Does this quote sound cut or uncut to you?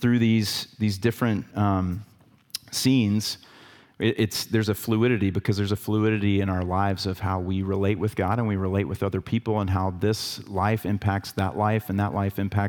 uncut